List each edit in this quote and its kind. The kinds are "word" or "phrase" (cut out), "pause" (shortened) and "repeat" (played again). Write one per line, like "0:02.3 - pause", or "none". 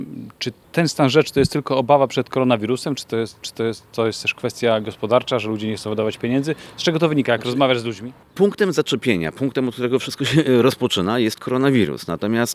0:03.4 - repeat